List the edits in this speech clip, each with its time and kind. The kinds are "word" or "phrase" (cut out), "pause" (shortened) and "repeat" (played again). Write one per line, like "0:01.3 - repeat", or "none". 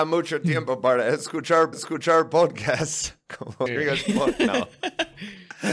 0:01.7 - repeat
0:03.7 - word

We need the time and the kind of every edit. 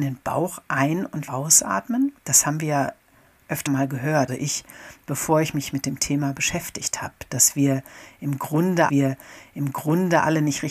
0:01.3 - word
0:02.2 - pause
0:03.7 - word
0:04.3 - word
0:08.9 - repeat

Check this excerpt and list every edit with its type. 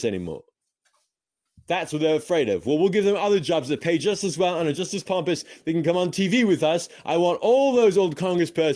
none

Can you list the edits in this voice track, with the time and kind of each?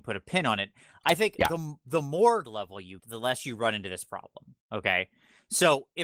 0:02.4 - word
0:03.0 - word
0:04.6 - pause

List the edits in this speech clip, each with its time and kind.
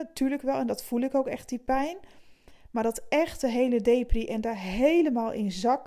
none

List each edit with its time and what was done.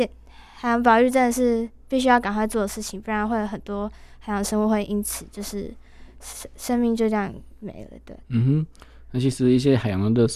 0:08.2 - pause

